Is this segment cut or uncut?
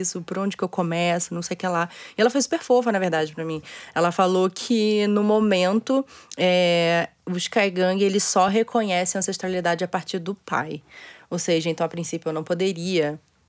uncut